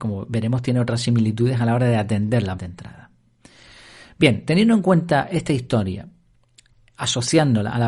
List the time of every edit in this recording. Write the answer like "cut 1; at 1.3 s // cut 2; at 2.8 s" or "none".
cut 1; at 2.6 s